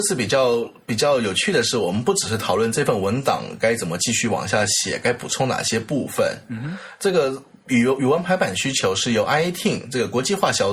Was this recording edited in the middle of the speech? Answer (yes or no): no